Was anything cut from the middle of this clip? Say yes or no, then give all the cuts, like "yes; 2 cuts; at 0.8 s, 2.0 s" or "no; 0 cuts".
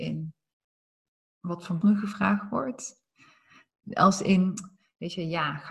yes; 2 cuts; at 1.1 s, 1.8 s